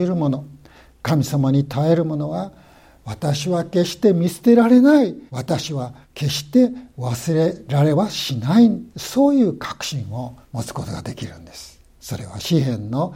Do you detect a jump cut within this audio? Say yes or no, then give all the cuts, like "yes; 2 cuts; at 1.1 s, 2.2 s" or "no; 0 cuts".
yes; 5 cuts; at 5.3 s, 6.0 s, 8.9 s, 10.4 s, 11.9 s